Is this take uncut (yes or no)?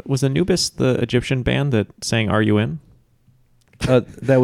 yes